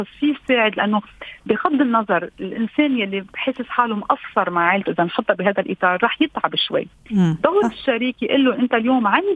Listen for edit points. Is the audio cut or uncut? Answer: uncut